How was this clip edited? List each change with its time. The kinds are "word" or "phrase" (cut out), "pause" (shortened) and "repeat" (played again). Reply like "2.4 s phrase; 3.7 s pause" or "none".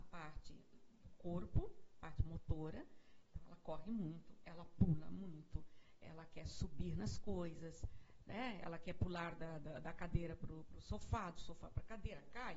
none